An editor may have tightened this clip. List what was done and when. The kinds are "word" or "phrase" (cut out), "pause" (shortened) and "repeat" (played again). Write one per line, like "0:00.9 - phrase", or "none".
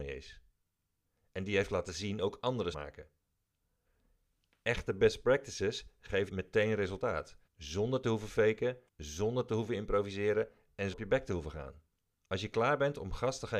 0:02.7 - phrase
0:06.3 - word
0:07.5 - pause
0:08.9 - pause
0:10.9 - word
0:11.9 - pause